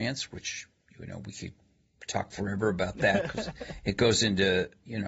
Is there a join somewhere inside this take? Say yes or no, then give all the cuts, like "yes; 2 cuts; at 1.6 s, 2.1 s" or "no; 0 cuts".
no; 0 cuts